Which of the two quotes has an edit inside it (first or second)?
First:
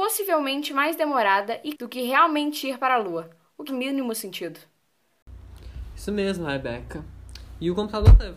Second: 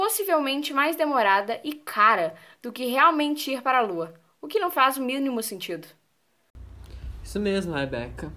first